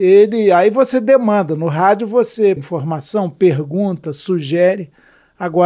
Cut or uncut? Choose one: cut